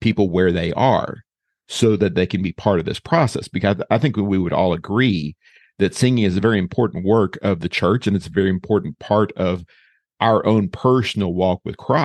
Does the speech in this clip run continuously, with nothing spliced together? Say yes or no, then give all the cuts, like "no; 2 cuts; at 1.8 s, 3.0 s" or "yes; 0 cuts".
yes; 0 cuts